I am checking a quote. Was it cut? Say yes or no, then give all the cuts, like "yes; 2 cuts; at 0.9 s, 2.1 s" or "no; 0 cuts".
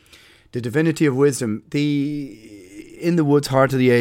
no; 0 cuts